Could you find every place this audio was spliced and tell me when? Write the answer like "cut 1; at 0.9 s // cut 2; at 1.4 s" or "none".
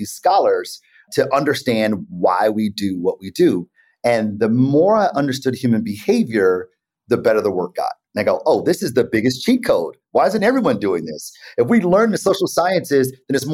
none